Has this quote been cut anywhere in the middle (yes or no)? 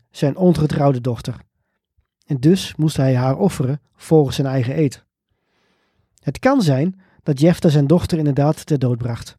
no